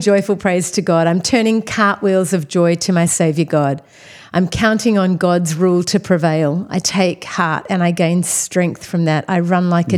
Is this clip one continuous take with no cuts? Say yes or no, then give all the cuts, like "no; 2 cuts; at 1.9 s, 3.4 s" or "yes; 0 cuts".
yes; 0 cuts